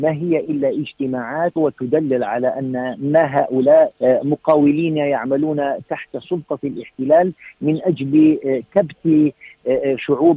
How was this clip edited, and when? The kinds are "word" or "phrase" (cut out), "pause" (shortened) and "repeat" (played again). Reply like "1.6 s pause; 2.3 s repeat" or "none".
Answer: 1.6 s phrase; 4.0 s word